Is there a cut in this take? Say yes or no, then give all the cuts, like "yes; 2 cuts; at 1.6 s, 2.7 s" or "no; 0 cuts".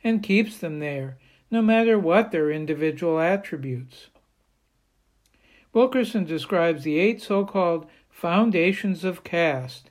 no; 0 cuts